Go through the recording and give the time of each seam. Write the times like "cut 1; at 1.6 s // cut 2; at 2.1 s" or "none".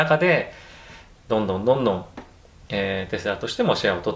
none